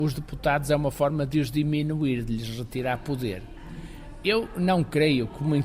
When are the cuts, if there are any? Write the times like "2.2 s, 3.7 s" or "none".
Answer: none